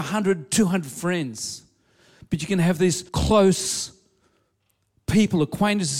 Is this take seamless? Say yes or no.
no